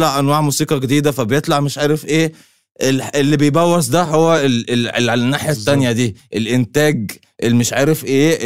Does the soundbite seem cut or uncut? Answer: uncut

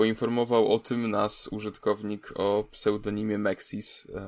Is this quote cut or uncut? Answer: uncut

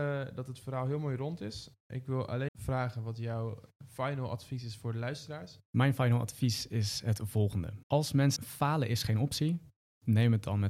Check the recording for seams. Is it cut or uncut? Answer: cut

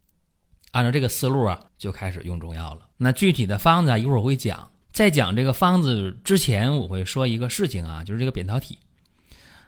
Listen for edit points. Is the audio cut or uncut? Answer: cut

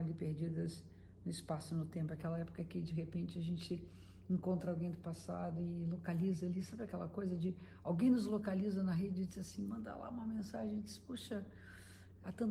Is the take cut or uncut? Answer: uncut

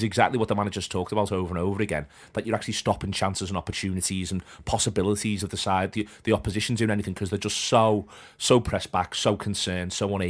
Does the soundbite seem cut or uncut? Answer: uncut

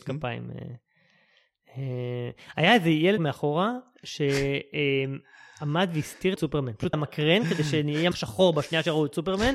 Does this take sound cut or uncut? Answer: cut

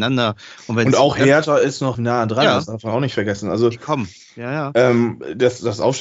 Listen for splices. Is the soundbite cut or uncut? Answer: cut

